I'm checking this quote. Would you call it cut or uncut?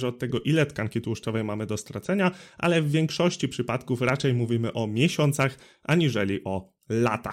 uncut